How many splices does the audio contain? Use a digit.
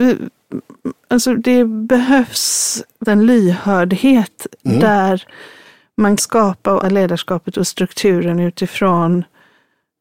4